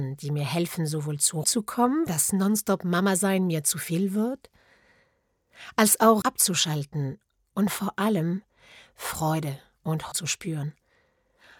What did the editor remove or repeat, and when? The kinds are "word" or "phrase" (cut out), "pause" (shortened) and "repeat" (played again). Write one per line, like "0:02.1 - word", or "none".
0:01.4 - word
0:02.1 - word
0:06.2 - word
0:10.1 - word